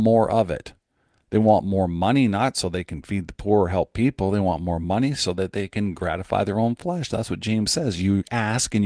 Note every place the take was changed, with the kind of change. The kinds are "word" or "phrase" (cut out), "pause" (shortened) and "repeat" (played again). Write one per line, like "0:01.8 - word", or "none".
none